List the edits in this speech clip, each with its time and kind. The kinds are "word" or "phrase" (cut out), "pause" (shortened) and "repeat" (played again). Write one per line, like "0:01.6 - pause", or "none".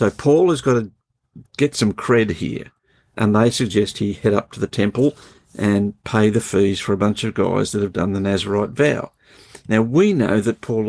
0:01.5 - pause
0:03.1 - word